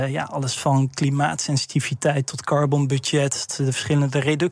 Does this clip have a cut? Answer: yes; 1 cut; at 3.5 s

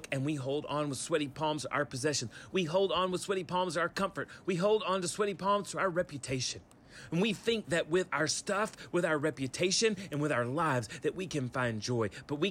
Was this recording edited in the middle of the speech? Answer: no; 0 cuts

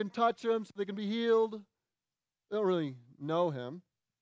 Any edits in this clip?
no; 0 cuts

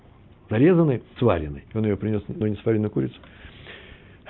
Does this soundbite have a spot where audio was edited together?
yes; 3 cuts; at 1.2 s, 1.7 s, 2.4 s

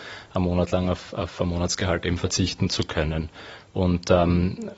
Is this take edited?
no; 0 cuts

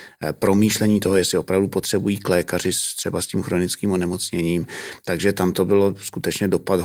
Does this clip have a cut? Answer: no; 0 cuts

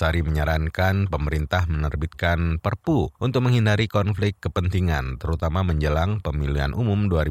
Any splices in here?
yes; 1 cut; at 3.1 s

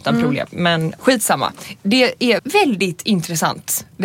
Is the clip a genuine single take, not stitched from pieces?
no; 2 cuts; at 1.0 s, 2.4 s

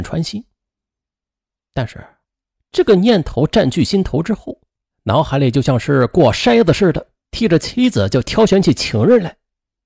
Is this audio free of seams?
yes; 0 cuts

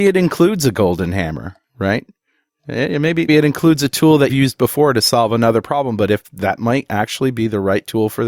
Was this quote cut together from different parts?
yes; 2 cuts; at 3.3 s, 4.3 s

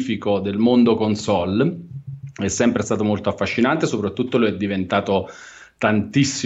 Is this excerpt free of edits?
yes; 0 cuts

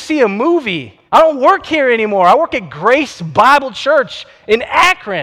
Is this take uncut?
no; 1 cut; at 1.1 s

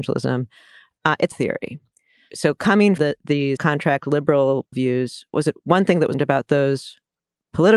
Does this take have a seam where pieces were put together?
yes; 6 cuts; at 1.3 s, 3.0 s, 3.6 s, 4.7 s, 5.3 s, 6.1 s

